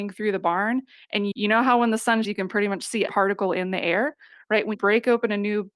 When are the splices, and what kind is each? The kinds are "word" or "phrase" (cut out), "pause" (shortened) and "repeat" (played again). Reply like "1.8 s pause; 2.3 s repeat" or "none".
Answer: 1.3 s word; 2.2 s word; 3.1 s word; 4.7 s word